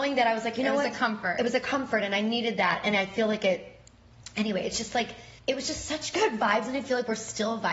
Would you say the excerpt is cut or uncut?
cut